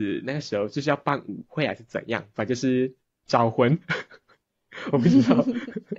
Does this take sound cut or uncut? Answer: uncut